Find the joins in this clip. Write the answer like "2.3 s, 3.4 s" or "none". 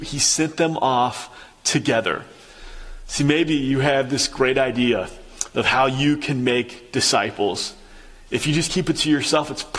none